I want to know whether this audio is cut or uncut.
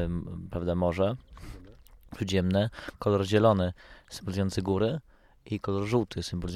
uncut